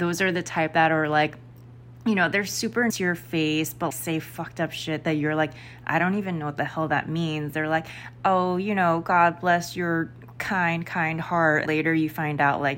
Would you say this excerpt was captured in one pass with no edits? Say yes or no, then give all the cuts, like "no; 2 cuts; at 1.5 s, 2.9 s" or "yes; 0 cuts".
no; 3 cuts; at 2.9 s, 3.9 s, 11.7 s